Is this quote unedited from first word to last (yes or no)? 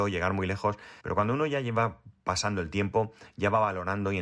no